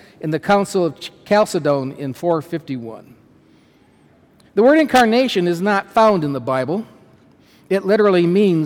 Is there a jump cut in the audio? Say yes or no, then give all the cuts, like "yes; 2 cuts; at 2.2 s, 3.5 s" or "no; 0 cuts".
no; 0 cuts